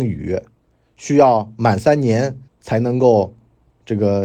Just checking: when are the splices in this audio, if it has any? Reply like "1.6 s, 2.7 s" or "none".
2.5 s